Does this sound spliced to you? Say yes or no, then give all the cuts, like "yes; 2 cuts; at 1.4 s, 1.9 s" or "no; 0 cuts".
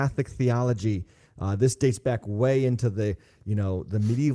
no; 0 cuts